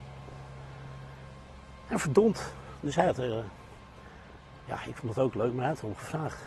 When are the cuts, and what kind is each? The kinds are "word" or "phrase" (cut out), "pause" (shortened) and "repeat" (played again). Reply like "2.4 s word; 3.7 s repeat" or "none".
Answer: none